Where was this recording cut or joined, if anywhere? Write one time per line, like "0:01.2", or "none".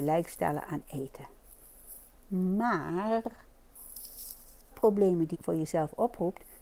0:04.7
0:05.3